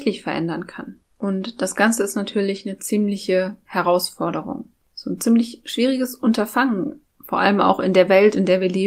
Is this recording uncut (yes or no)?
no